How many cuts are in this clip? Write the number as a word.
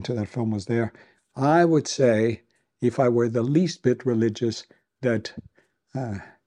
zero